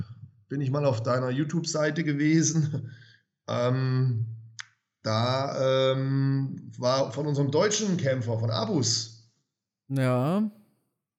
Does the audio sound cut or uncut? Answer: uncut